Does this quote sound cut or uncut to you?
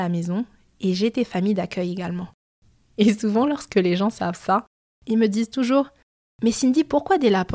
uncut